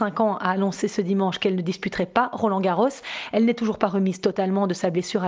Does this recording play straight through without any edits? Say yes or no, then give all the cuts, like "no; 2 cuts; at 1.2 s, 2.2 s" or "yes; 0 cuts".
yes; 0 cuts